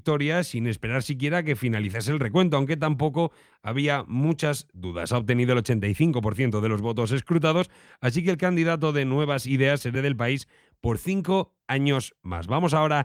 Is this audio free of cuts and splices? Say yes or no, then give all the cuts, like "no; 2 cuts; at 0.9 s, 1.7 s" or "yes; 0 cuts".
no; 1 cut; at 9.9 s